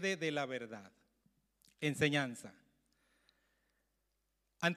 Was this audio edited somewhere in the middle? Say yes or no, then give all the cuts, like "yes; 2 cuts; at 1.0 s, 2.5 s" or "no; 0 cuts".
yes; 1 cut; at 1.2 s